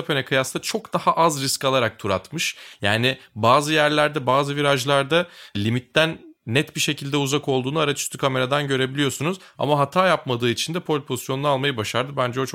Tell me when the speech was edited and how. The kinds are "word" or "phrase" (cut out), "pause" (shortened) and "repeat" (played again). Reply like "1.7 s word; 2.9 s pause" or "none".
6.4 s pause